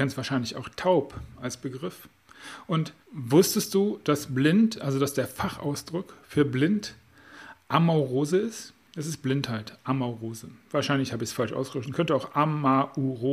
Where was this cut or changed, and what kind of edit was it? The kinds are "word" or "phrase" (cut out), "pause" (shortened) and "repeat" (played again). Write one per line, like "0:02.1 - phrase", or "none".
0:03.0 - pause
0:08.8 - pause